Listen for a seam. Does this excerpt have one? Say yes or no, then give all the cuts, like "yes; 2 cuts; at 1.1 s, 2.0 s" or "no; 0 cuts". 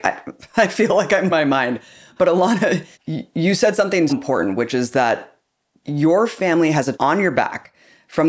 yes; 4 cuts; at 1.3 s, 2.9 s, 4.1 s, 6.9 s